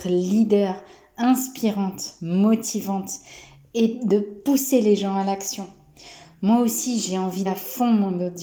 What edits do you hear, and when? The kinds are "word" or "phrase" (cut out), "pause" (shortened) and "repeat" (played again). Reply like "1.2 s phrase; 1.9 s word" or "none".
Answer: 7.5 s word